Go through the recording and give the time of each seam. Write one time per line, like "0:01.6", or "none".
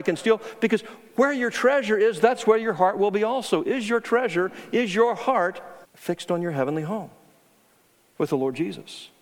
0:05.8